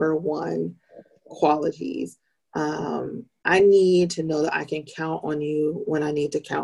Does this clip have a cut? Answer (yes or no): no